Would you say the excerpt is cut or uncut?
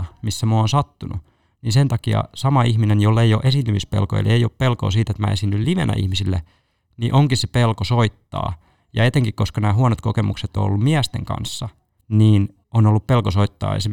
uncut